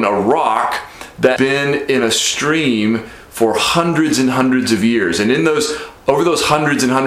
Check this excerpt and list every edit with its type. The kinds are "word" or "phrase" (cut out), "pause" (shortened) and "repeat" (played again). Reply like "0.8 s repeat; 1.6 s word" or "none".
1.4 s word